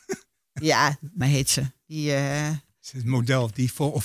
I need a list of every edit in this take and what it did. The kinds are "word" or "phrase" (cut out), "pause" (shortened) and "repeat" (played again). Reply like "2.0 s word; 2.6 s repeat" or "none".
1.2 s word